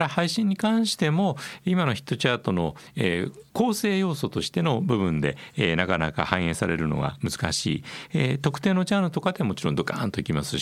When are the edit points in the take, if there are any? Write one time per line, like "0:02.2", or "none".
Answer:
0:03.5